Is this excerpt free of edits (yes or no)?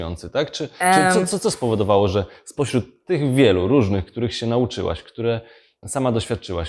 yes